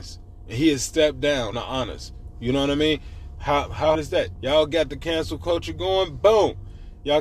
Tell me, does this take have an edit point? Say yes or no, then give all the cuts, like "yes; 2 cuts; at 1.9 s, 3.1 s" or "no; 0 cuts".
yes; 2 cuts; at 1.5 s, 3.9 s